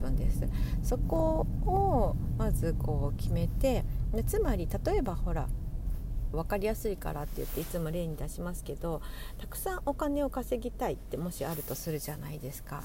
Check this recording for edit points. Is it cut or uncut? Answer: cut